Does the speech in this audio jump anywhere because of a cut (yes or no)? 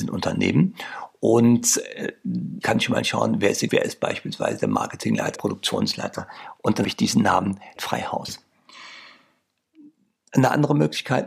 yes